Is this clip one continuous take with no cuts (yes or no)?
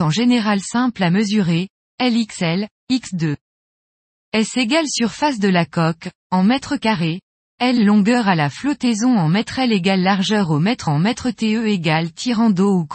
no